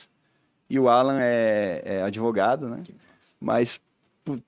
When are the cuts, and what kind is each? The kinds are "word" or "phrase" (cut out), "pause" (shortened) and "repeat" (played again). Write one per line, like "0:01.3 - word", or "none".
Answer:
none